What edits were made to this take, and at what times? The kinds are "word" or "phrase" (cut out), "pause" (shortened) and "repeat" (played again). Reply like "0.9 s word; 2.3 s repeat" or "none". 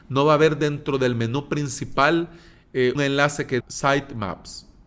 3.0 s word; 3.6 s word